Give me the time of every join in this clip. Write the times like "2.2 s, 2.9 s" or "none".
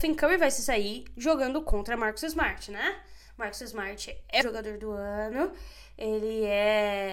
4.4 s